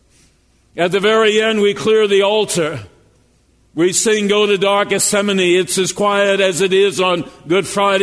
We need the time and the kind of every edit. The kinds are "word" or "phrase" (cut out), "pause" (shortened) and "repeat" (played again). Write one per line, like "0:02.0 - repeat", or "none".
none

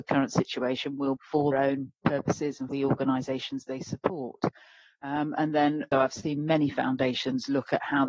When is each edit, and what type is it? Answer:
0:01.2 - word
0:01.5 - word
0:02.7 - word
0:05.9 - word

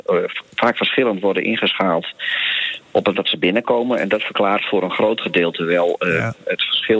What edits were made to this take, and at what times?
0:03.1 - word

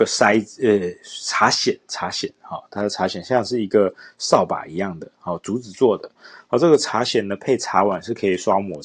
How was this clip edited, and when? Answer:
none

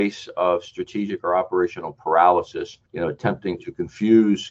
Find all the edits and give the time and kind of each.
none

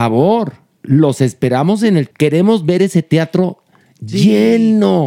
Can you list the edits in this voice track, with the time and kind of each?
0:02.1 - word

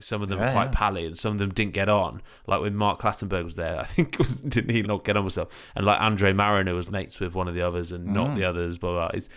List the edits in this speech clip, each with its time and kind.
0:04.8 - word
0:06.9 - word

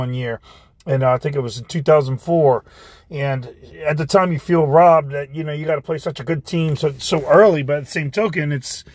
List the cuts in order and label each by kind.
none

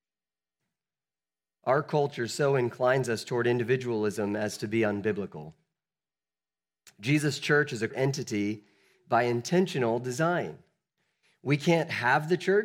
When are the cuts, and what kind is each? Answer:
0:07.9 - word

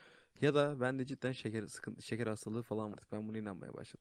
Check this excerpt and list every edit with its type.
0:02.9 - word

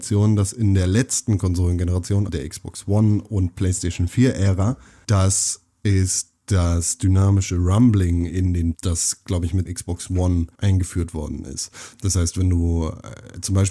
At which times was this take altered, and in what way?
0:02.3 - word
0:08.7 - word
0:09.7 - word
0:10.5 - word

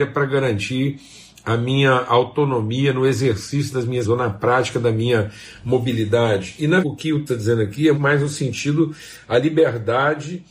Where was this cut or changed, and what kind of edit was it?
0:04.0 - word
0:06.8 - word
0:07.3 - word
0:07.9 - word

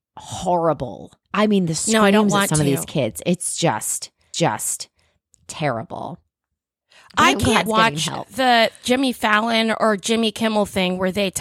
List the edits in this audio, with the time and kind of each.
0:01.2 - pause
0:04.3 - repeat
0:07.7 - word

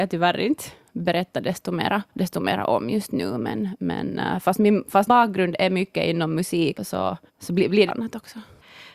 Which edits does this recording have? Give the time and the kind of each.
0:02.1 - pause
0:05.1 - word
0:06.7 - word
0:07.3 - pause
0:07.9 - phrase

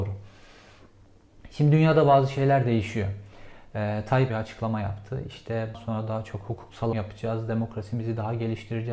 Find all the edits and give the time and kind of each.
0:04.3 - phrase
0:05.7 - word
0:06.9 - phrase

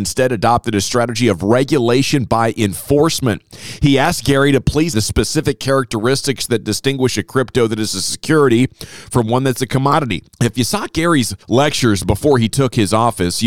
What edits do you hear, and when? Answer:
0:04.9 - word
0:10.3 - pause
0:11.4 - pause

